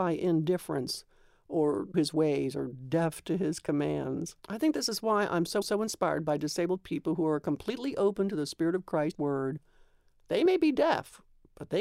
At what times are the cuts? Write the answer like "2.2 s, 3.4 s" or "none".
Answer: 1.9 s, 4.4 s, 5.6 s, 9.1 s